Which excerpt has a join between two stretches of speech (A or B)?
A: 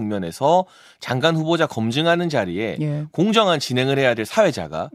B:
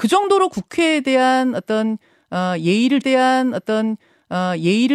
B